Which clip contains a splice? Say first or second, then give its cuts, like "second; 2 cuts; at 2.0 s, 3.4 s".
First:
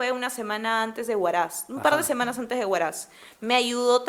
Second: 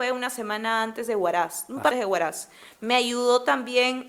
second; 1 cut; at 1.9 s